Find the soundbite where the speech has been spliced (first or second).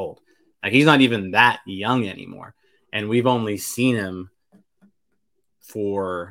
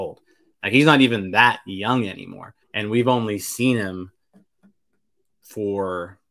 second